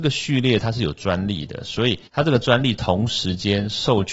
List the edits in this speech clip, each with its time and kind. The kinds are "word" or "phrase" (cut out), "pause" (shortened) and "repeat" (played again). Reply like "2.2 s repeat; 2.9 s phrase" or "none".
2.1 s pause